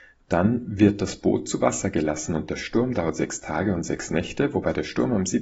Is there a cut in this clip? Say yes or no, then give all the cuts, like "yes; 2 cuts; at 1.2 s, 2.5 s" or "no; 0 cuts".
no; 0 cuts